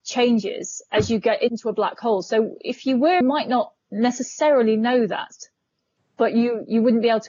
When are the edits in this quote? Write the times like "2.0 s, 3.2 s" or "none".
2.6 s, 3.2 s